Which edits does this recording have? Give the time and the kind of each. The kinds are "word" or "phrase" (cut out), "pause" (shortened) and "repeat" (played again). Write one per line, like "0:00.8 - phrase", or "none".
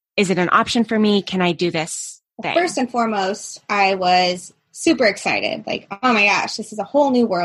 0:02.3 - pause